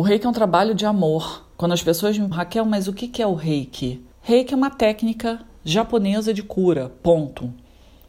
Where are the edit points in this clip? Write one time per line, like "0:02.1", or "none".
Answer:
0:01.5
0:02.3
0:04.1